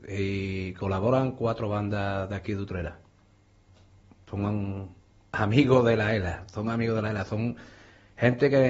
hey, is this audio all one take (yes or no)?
yes